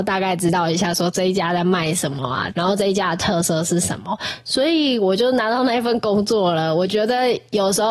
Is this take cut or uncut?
cut